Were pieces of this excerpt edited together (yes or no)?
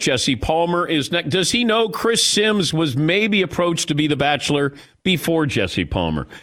no